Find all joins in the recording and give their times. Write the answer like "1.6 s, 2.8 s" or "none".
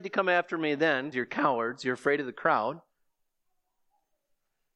1.1 s